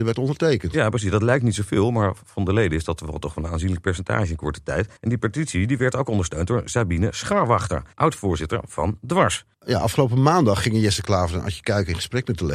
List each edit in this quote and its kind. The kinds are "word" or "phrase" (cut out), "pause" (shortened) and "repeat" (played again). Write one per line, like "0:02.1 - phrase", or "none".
0:05.0 - pause
0:07.9 - pause
0:09.5 - pause